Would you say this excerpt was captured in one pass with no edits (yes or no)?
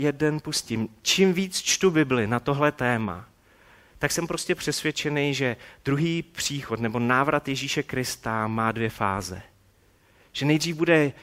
yes